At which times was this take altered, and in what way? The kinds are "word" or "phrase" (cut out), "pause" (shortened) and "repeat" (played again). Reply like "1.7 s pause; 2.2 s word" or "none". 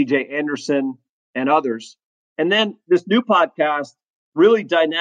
none